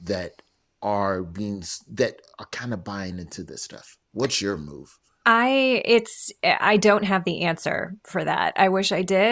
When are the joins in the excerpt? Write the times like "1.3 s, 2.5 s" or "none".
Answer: 4.0 s